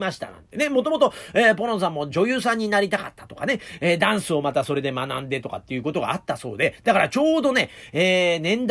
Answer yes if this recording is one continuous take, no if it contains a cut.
yes